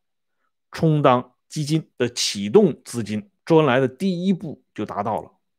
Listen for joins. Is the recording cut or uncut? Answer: cut